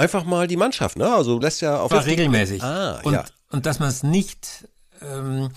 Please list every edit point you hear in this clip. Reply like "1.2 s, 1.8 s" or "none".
1.0 s, 1.4 s, 1.9 s